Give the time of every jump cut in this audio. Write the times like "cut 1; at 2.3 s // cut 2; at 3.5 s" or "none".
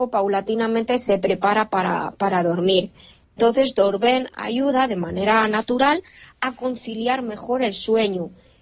none